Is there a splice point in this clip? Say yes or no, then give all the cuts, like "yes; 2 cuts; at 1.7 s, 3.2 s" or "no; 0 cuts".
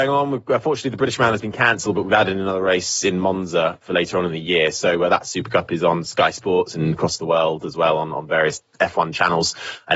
no; 0 cuts